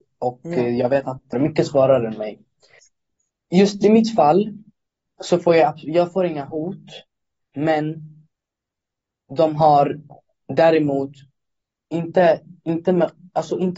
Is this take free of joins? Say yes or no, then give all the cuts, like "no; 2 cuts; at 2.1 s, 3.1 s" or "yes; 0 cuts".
no; 1 cut; at 1.3 s